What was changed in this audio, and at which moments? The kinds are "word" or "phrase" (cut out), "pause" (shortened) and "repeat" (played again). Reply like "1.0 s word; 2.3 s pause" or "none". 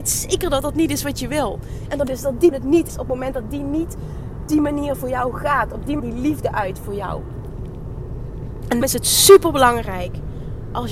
2.1 s word; 2.5 s word; 2.9 s word; 4.5 s word; 6.0 s word; 8.8 s word